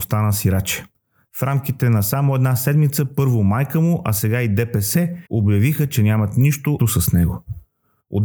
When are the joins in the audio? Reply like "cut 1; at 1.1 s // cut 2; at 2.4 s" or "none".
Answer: cut 1; at 5.3 s // cut 2; at 6.8 s